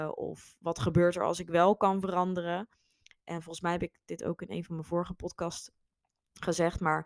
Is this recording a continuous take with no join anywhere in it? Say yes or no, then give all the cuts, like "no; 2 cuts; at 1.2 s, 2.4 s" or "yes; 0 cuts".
yes; 0 cuts